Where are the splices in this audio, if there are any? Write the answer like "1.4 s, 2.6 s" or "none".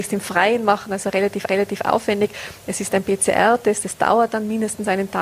1.5 s